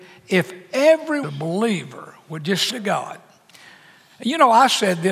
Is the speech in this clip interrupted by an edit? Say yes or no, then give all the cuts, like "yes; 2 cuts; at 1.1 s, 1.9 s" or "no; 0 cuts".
yes; 2 cuts; at 1.2 s, 2.7 s